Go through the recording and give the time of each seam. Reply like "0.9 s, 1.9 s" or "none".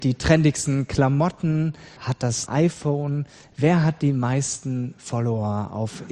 2.0 s, 2.5 s